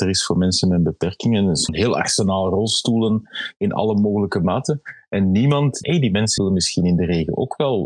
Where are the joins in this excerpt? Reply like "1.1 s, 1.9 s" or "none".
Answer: 1.7 s, 5.8 s, 6.4 s